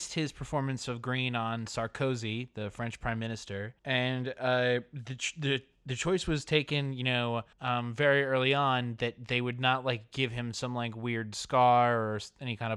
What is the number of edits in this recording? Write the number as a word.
two